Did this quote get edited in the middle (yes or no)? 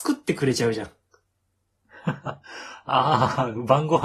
no